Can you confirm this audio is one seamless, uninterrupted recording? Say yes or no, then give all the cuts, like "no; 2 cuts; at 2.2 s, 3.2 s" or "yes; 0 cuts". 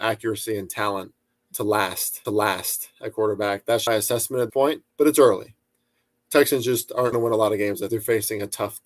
no; 7 cuts; at 1.3 s, 2.2 s, 3.9 s, 4.5 s, 4.9 s, 7.1 s, 7.9 s